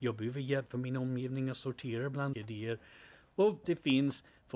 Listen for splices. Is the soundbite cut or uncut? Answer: cut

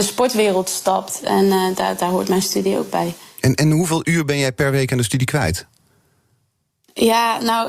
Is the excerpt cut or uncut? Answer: uncut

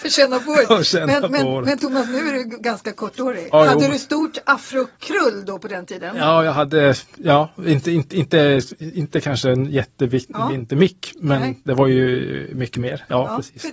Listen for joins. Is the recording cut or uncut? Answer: cut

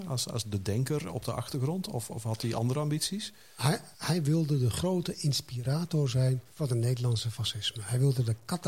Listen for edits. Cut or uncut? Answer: cut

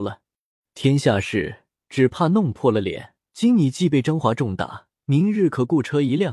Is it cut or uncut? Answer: cut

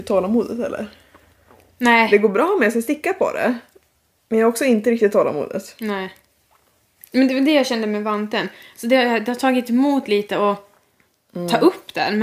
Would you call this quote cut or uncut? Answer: uncut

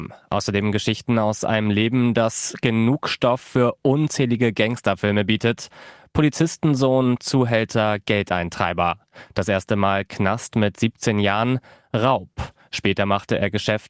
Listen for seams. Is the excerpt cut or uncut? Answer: uncut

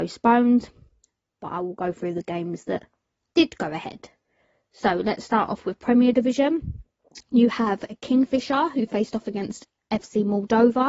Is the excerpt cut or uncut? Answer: uncut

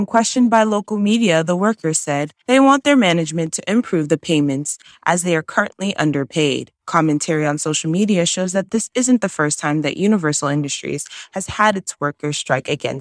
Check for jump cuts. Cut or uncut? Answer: uncut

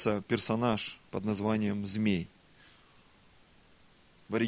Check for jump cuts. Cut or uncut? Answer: cut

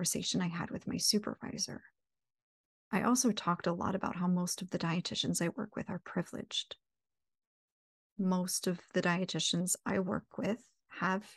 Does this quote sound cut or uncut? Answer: uncut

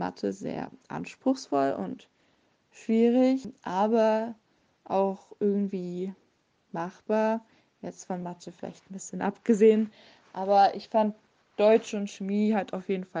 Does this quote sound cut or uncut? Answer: uncut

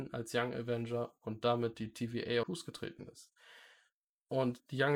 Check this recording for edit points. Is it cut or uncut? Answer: cut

